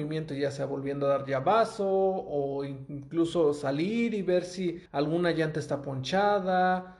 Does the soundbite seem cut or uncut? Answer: cut